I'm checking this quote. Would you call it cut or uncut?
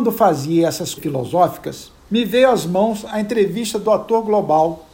cut